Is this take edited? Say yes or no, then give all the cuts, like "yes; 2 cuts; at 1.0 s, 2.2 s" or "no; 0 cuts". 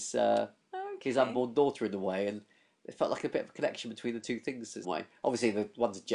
yes; 1 cut; at 4.8 s